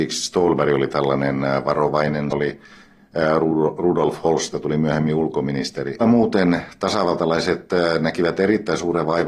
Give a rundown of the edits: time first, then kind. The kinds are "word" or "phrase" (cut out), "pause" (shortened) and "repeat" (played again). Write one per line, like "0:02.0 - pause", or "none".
0:02.3 - phrase
0:04.5 - word
0:06.0 - phrase